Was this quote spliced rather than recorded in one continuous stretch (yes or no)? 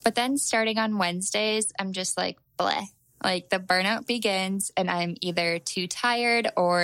no